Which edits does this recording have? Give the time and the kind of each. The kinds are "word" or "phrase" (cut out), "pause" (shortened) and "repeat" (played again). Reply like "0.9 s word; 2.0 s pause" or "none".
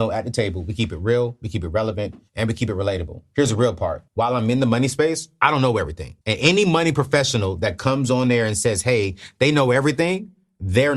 2.3 s pause; 4.1 s pause; 6.2 s pause